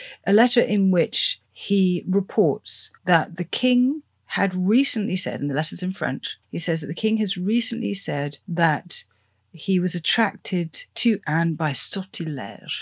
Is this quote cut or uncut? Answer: cut